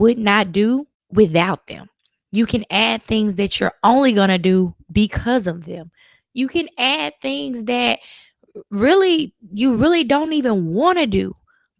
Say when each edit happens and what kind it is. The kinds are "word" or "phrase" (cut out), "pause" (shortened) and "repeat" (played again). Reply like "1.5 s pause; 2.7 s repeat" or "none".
none